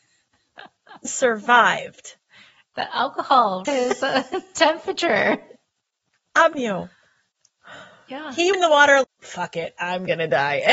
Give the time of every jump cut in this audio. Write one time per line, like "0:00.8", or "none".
0:01.0
0:03.6
0:06.5
0:08.5
0:09.0